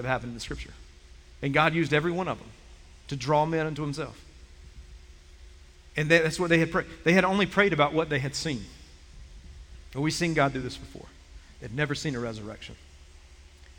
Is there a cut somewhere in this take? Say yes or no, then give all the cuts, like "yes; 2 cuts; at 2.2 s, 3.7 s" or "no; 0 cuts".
no; 0 cuts